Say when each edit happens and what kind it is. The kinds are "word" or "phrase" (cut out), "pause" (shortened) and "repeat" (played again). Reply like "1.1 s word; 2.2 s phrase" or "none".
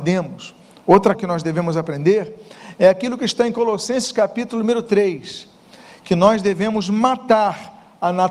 1.2 s word